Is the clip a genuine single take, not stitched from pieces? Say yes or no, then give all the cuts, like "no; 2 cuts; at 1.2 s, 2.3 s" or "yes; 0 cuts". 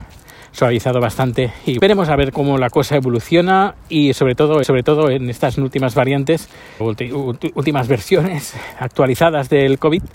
no; 4 cuts; at 1.8 s, 2.3 s, 4.6 s, 6.8 s